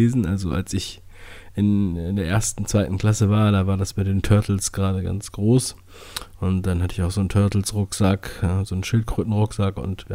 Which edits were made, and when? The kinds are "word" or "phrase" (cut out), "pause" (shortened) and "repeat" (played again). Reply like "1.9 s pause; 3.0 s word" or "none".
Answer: none